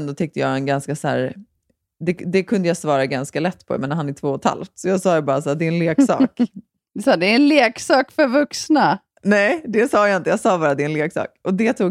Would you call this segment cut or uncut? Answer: uncut